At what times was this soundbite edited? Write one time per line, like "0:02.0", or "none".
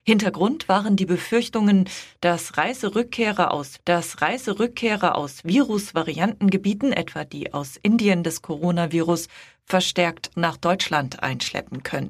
0:03.8
0:08.2
0:10.3